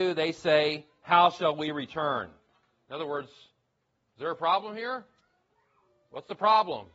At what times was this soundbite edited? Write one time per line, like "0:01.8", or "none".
none